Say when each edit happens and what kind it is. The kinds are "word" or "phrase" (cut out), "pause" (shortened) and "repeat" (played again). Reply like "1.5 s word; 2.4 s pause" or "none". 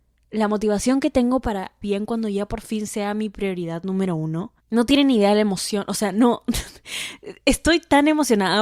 1.8 s phrase; 4.6 s pause